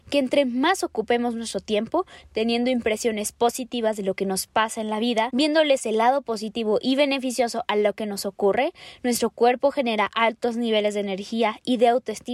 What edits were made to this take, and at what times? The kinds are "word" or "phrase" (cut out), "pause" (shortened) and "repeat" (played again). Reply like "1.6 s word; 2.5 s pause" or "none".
none